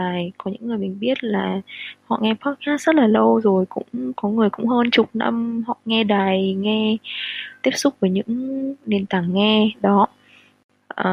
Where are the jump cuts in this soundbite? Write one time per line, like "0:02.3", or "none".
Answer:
none